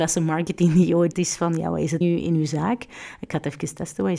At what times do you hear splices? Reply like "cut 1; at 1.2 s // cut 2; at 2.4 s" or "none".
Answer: cut 1; at 1.1 s // cut 2; at 2.0 s